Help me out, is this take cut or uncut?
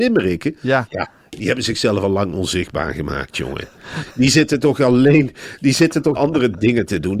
cut